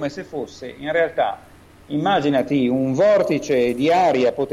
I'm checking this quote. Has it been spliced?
no; 0 cuts

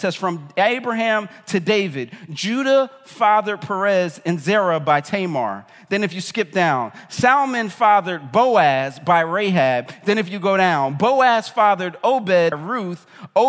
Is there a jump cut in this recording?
yes; 1 cut; at 12.5 s

